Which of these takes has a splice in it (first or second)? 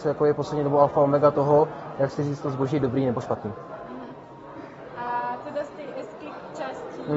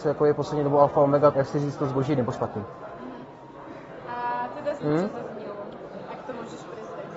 second